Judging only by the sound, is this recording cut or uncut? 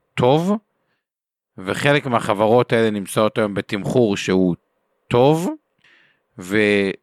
uncut